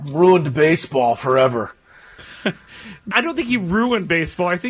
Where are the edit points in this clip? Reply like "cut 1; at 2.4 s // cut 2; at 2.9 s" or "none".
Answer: cut 1; at 3.1 s